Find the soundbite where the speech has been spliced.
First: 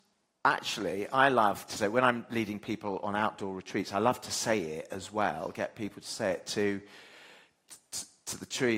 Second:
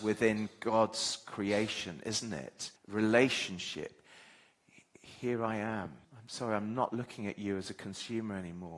second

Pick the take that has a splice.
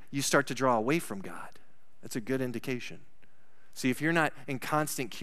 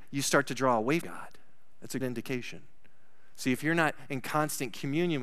second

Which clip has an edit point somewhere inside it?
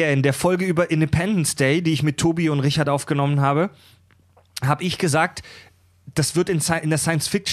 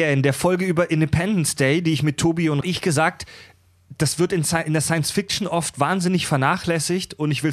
second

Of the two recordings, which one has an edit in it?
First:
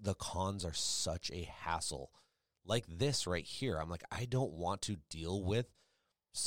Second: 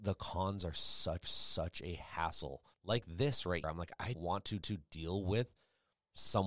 second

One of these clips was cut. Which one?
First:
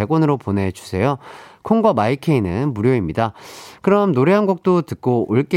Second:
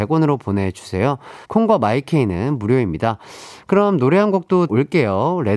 second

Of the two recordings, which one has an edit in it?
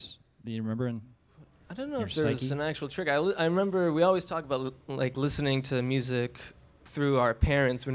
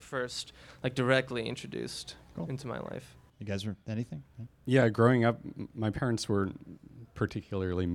second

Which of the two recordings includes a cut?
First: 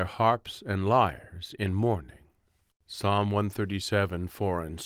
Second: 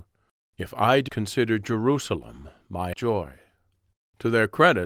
second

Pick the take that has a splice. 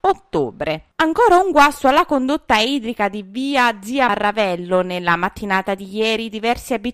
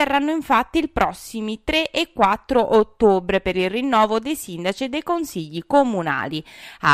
first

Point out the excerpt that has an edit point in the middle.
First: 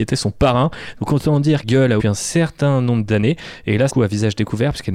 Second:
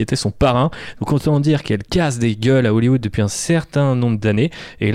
first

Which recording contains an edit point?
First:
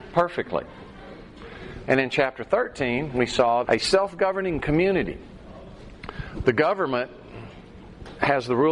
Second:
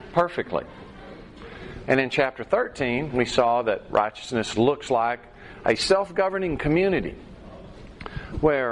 first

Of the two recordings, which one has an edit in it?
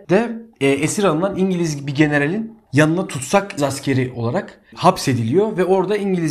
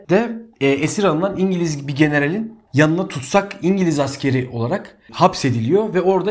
first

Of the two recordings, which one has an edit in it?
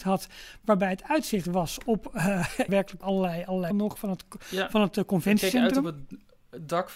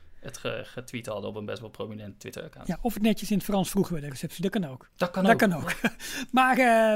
first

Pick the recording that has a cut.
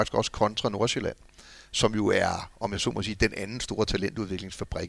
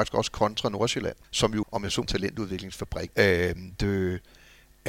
second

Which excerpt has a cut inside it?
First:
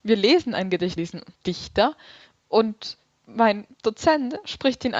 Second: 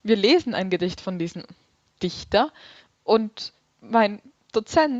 first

